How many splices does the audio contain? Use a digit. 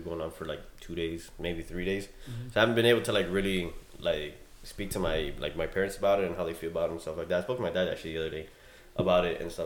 0